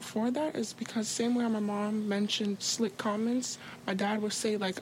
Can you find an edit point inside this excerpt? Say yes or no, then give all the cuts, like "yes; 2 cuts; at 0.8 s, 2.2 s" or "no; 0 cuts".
yes; 1 cut; at 2.6 s